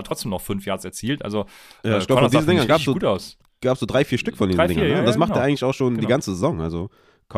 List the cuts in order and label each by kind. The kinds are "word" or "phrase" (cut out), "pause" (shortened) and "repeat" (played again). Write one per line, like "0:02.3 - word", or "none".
none